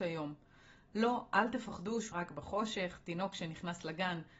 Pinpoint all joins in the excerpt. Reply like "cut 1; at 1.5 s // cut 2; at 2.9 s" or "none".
cut 1; at 2.1 s